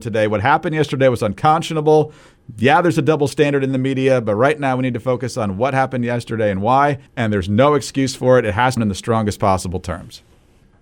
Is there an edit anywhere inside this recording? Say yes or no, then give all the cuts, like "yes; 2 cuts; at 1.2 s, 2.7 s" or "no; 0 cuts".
yes; 2 cuts; at 7.1 s, 8.8 s